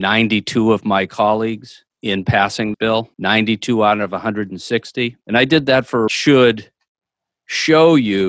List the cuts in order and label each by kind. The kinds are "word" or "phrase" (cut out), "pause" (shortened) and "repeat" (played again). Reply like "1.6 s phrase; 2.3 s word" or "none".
1.9 s pause; 2.7 s word; 3.1 s pause; 5.2 s pause; 6.1 s phrase